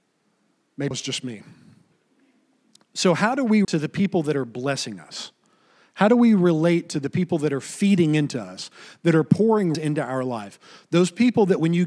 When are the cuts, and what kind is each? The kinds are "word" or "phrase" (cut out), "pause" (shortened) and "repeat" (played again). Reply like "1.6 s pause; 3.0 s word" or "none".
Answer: 0.9 s word; 3.6 s word; 9.7 s word